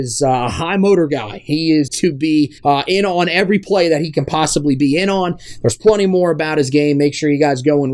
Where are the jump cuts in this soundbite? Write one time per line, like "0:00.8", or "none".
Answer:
0:01.9
0:02.6